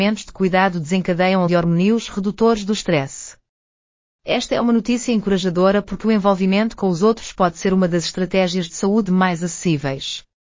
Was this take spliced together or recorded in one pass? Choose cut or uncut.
cut